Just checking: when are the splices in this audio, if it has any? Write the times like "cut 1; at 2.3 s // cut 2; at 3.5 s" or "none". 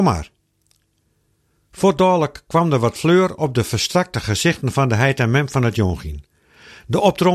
none